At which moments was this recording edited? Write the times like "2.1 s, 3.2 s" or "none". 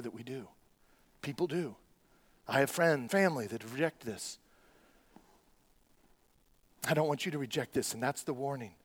3.1 s